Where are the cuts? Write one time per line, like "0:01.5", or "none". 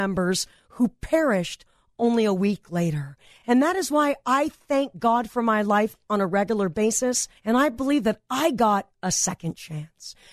0:07.4